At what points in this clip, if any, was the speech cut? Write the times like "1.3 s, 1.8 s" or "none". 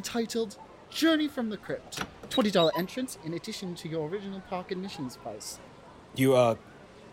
none